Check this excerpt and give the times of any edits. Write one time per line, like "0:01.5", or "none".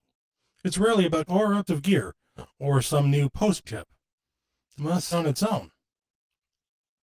0:01.3
0:01.7
0:03.6
0:04.8
0:05.1